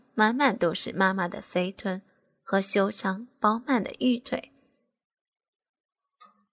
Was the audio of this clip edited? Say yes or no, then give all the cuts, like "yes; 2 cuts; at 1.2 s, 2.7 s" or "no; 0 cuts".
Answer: no; 0 cuts